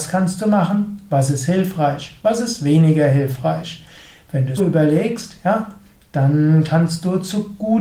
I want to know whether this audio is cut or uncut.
cut